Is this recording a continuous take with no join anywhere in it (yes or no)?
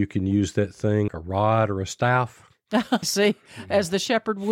no